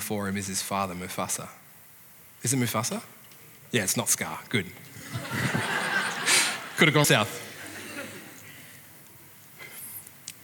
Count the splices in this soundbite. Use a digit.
1